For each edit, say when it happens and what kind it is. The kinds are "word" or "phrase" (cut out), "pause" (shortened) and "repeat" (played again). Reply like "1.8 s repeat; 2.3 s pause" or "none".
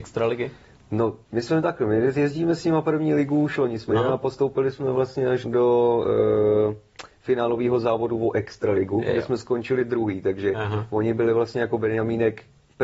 1.2 s pause; 3.9 s word; 5.4 s word